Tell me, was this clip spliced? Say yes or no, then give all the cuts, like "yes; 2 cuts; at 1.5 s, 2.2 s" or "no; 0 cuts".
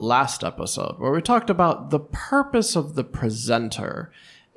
no; 0 cuts